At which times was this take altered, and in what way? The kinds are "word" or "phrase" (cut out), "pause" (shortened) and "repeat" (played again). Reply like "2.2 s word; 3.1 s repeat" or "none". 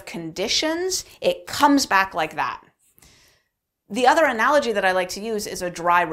none